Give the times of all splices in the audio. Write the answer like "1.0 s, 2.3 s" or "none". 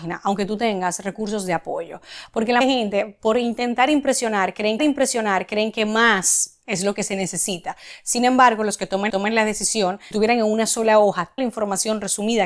2.6 s, 4.8 s, 6.6 s, 9.1 s, 10.1 s, 11.4 s